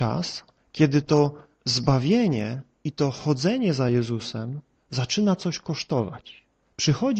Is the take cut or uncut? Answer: uncut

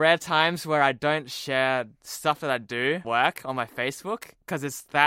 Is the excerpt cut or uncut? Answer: cut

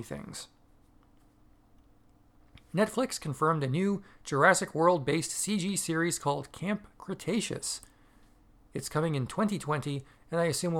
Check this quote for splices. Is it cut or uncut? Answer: uncut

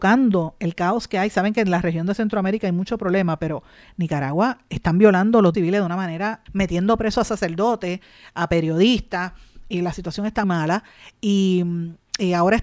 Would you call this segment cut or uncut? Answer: cut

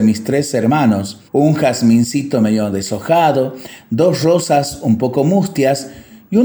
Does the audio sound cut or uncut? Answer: cut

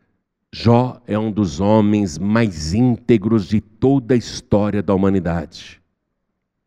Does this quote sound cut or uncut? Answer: uncut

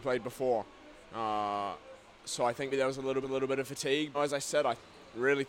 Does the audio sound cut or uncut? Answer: cut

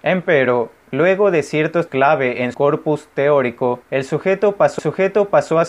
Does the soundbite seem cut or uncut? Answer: cut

